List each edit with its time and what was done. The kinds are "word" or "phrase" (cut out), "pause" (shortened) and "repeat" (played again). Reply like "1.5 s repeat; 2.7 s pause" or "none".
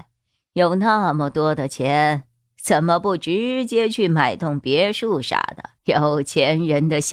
5.8 s pause